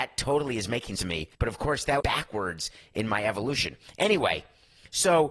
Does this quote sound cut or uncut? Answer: cut